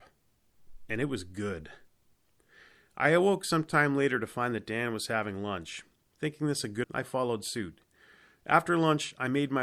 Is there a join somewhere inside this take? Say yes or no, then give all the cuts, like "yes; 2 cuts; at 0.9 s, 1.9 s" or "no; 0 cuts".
yes; 1 cut; at 6.8 s